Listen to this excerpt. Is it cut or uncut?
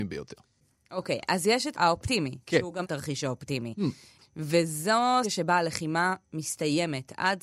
cut